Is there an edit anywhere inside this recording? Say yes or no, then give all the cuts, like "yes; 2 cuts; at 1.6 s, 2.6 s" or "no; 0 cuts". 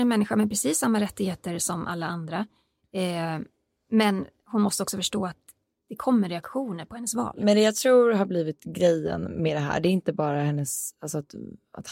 no; 0 cuts